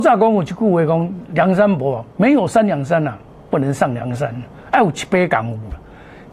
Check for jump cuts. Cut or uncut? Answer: cut